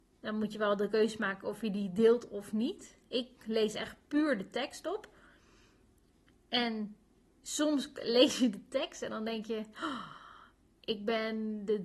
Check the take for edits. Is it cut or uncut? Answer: uncut